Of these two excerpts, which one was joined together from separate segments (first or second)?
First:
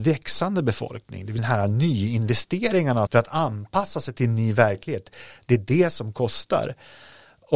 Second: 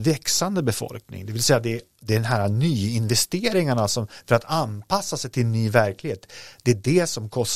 first